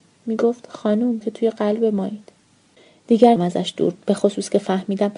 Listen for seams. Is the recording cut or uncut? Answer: cut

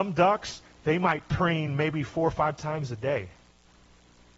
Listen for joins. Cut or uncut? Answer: uncut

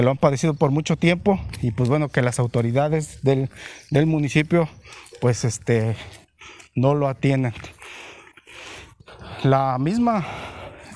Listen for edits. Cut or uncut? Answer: uncut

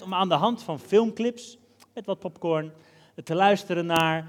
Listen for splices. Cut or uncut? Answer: uncut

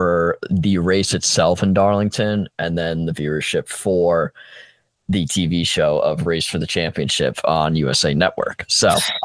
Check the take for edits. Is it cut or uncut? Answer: uncut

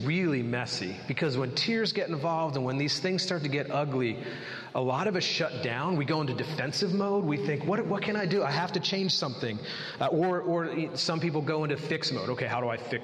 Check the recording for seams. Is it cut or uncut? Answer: uncut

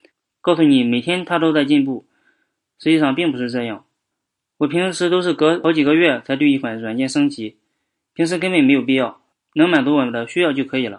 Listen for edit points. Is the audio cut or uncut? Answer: uncut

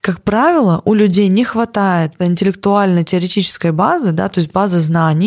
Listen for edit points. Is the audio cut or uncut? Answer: cut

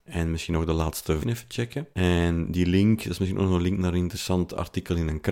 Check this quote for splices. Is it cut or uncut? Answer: cut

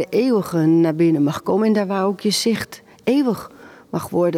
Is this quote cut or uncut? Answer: uncut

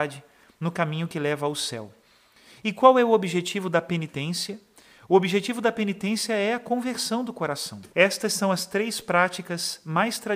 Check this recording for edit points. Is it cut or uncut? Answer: cut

